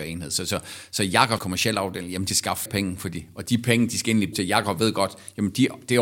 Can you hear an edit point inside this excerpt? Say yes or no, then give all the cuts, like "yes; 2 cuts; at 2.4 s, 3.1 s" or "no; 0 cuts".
yes; 4 cuts; at 1.4 s, 2.3 s, 2.7 s, 4.3 s